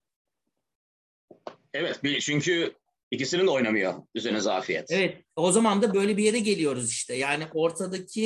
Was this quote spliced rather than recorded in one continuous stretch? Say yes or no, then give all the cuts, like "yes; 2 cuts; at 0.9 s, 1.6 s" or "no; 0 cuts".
no; 0 cuts